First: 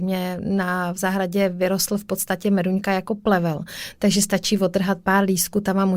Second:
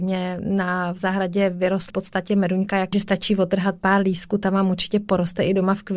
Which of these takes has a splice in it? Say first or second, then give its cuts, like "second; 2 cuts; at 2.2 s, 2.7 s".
second; 2 cuts; at 1.9 s, 2.9 s